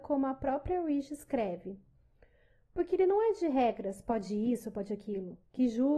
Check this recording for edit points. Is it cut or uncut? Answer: uncut